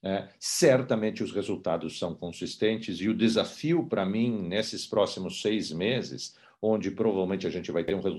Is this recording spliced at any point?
no; 0 cuts

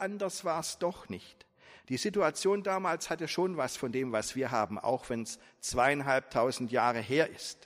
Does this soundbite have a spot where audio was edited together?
no; 0 cuts

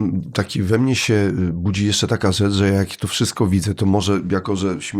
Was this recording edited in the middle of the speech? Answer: no; 0 cuts

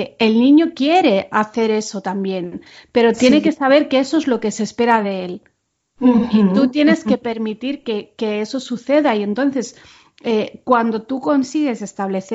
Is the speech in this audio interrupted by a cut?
no; 0 cuts

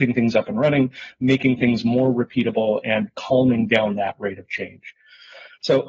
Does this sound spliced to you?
no; 0 cuts

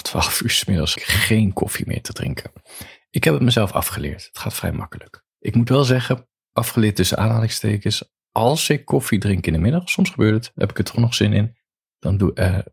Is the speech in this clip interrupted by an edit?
yes; 2 cuts; at 1.0 s, 5.3 s

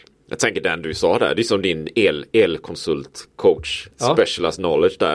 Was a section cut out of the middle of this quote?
yes; 1 cut; at 3.9 s

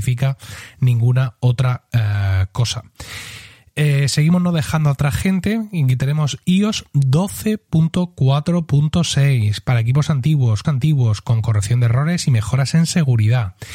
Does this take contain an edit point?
yes; 1 cut; at 10.6 s

